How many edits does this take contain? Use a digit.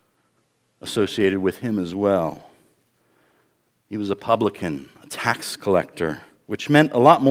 0